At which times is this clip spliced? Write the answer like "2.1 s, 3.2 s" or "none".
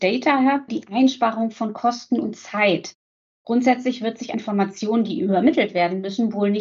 4.3 s